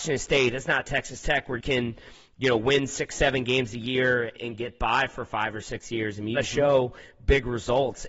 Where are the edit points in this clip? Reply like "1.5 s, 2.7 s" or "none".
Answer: 1.6 s, 4.4 s, 6.4 s

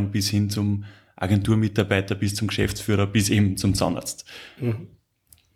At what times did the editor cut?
none

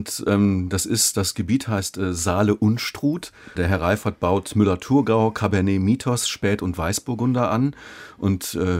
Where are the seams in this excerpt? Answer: 3.5 s

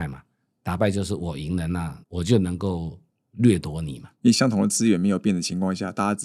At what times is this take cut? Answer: 2.0 s

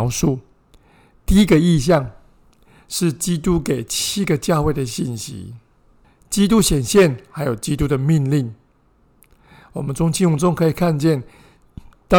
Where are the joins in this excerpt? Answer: none

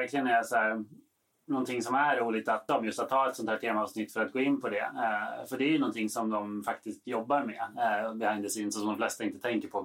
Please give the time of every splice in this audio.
2.7 s

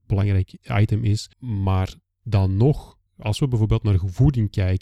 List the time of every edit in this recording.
1.3 s, 3.1 s

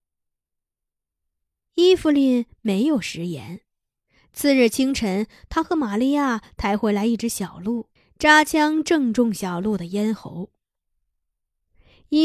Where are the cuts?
8.0 s

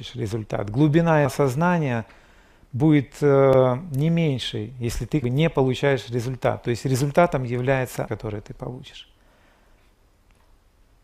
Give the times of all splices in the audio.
1.3 s, 5.2 s, 8.1 s

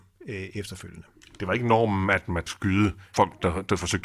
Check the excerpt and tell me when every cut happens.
2.5 s

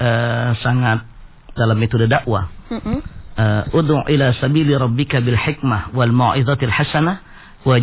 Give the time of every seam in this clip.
1.6 s

